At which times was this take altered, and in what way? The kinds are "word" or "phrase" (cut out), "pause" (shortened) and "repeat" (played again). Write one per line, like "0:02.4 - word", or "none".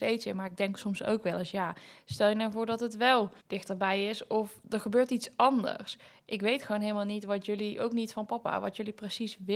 0:03.4 - pause